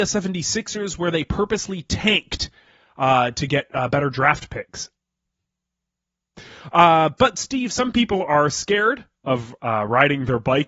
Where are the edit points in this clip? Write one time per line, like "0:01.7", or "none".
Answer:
none